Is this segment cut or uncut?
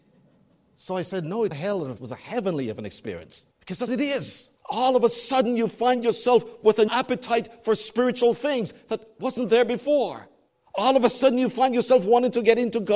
cut